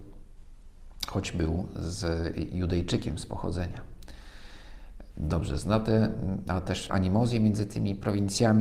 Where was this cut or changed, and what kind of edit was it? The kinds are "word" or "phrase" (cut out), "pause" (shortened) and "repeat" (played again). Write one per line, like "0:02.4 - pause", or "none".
0:06.9 - word